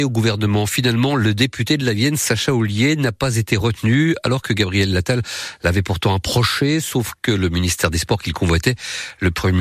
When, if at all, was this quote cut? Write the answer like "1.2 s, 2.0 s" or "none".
none